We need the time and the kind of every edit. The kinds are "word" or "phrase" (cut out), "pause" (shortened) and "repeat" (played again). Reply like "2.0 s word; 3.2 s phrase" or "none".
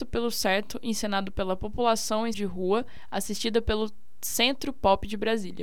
2.3 s word